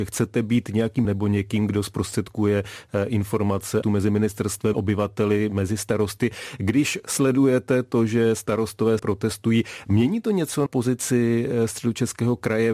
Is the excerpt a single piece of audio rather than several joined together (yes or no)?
no